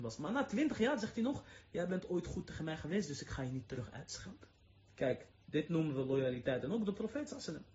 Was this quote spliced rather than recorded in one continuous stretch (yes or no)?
yes